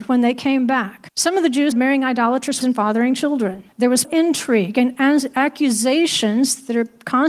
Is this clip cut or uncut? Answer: cut